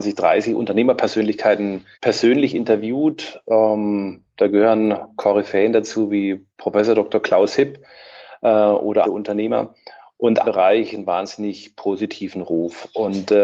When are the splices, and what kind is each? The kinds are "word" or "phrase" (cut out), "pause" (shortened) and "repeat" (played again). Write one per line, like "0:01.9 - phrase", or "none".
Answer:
0:01.9 - pause
0:06.5 - pause
0:09.0 - phrase
0:10.4 - phrase